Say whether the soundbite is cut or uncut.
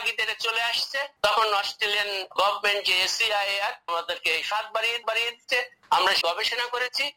cut